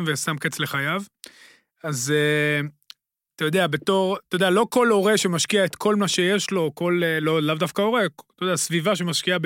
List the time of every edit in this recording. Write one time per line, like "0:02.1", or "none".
none